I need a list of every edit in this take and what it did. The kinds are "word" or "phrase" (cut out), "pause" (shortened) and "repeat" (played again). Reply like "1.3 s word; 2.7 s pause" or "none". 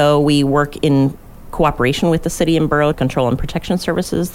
2.9 s phrase

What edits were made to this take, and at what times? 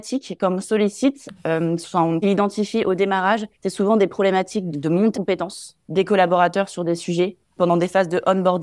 2.2 s phrase; 3.5 s pause; 4.7 s word; 5.1 s word; 5.8 s pause; 7.6 s word

